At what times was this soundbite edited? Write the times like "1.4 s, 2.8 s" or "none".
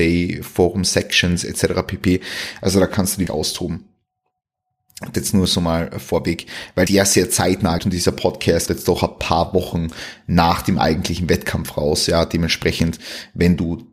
3.3 s, 5.1 s, 6.9 s, 7.8 s, 8.7 s